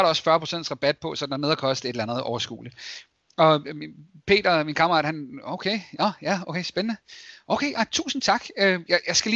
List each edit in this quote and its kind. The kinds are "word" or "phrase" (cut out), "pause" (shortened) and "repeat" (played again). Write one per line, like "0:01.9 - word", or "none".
none